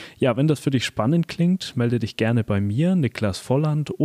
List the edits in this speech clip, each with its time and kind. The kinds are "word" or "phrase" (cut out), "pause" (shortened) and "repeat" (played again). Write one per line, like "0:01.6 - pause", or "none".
none